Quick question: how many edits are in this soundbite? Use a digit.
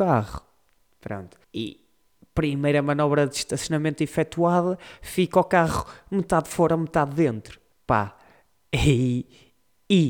2